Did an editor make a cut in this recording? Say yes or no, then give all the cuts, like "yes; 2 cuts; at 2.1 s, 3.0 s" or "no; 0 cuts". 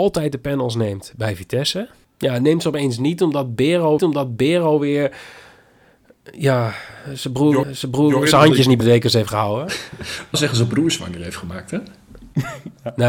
yes; 5 cuts; at 2.0 s, 4.0 s, 7.6 s, 8.8 s, 10.3 s